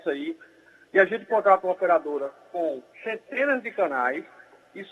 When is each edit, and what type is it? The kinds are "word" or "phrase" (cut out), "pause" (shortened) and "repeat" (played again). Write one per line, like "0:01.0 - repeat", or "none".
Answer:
0:02.9 - pause